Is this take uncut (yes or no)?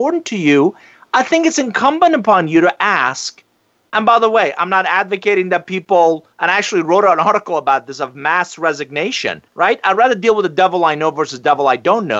no